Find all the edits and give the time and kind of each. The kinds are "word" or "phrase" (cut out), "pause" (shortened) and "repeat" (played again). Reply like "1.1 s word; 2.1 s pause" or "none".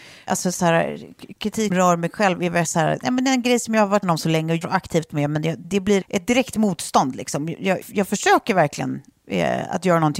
1.7 s word; 4.0 s word; 4.6 s word; 5.6 s word; 6.0 s word; 7.8 s word